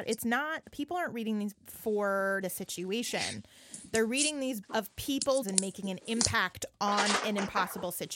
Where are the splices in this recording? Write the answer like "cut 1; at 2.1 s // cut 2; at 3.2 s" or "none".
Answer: cut 1; at 1.5 s // cut 2; at 2.4 s // cut 3; at 4.6 s // cut 4; at 5.4 s